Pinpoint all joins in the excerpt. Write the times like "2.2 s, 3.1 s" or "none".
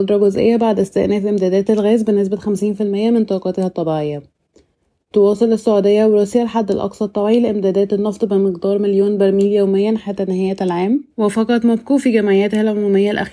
11.1 s